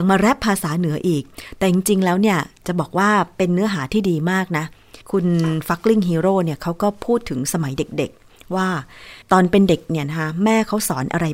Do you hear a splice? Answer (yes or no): yes